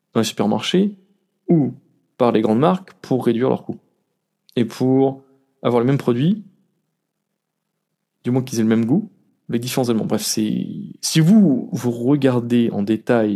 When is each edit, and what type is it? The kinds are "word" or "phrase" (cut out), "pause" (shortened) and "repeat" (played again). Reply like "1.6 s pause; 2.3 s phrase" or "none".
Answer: none